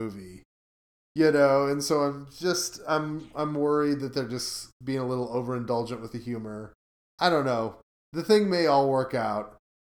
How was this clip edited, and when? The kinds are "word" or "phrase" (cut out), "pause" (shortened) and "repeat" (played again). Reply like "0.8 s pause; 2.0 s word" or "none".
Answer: none